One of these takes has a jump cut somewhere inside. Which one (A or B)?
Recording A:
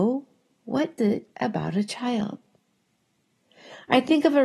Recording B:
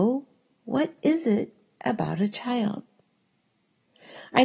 A